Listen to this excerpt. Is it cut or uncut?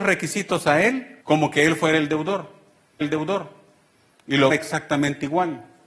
cut